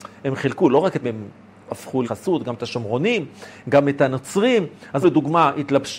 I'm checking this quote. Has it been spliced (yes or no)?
yes